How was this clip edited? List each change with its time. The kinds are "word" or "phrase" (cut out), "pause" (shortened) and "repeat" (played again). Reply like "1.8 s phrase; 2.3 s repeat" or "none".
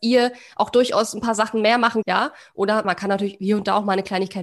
2.0 s phrase; 2.8 s word